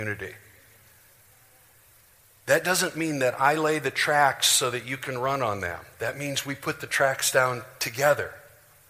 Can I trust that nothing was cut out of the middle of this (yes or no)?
yes